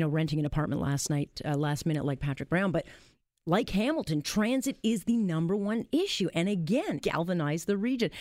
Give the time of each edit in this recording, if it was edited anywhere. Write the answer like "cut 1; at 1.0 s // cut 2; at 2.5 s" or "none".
cut 1; at 7.0 s